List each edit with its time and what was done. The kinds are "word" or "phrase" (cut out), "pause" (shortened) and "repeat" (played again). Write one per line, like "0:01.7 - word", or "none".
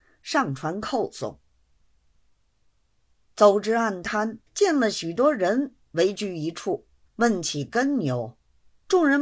0:04.5 - pause
0:07.1 - pause